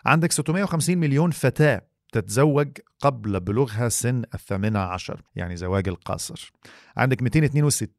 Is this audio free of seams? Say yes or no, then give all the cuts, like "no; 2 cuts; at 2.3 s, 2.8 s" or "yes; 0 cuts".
no; 1 cut; at 5.3 s